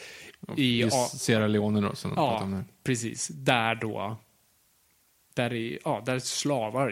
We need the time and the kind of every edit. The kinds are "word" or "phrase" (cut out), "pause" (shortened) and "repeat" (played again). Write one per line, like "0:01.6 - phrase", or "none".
none